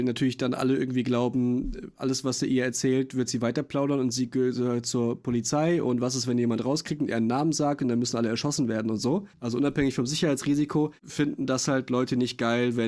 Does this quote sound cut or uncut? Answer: cut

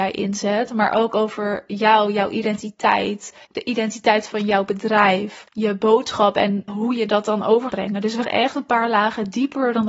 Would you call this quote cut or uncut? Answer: cut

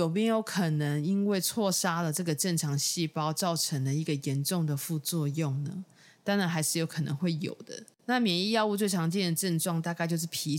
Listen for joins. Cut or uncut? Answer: uncut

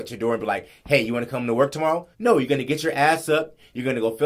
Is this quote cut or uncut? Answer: cut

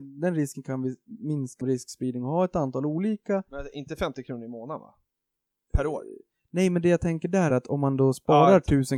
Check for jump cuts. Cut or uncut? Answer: cut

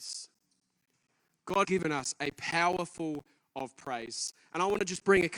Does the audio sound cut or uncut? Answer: cut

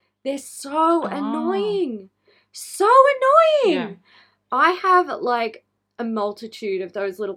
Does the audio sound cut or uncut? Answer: uncut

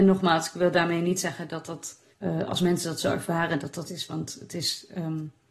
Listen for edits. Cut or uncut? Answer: cut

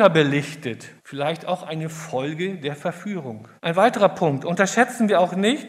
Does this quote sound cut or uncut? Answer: cut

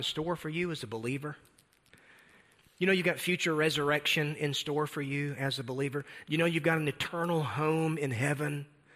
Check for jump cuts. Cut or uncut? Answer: uncut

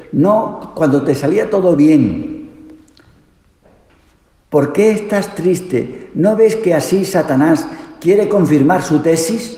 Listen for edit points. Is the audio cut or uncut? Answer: uncut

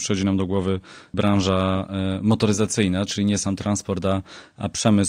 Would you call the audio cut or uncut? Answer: uncut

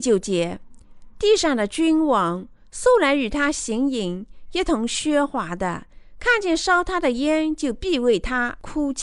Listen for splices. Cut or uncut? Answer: uncut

